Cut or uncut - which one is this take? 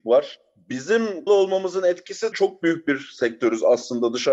cut